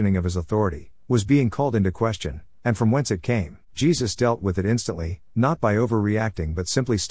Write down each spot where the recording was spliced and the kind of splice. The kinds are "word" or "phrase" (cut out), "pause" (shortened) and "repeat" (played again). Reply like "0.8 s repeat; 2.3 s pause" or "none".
3.6 s pause